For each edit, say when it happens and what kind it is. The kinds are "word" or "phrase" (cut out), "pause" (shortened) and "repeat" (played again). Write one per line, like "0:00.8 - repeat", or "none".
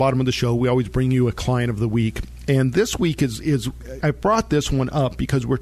0:04.0 - word